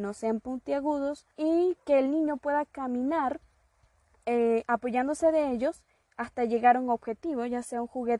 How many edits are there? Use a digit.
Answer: 1